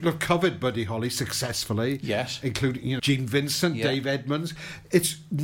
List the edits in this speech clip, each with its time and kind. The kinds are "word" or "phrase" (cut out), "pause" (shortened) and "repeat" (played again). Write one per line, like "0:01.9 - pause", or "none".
0:03.0 - phrase